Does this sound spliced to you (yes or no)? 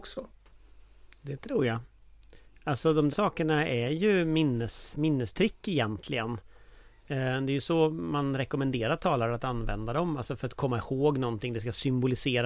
yes